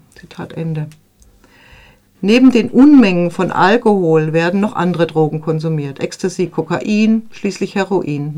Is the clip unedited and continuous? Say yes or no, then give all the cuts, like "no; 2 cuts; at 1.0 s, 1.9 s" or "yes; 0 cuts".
yes; 0 cuts